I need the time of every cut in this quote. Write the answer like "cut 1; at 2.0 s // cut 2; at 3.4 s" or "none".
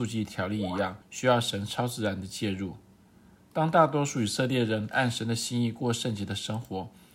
cut 1; at 1.0 s